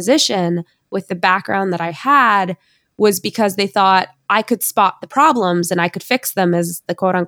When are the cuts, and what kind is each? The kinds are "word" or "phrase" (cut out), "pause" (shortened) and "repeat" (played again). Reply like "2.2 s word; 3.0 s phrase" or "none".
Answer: none